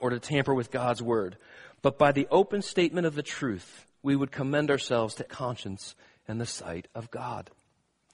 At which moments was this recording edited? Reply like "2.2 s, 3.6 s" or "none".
5.3 s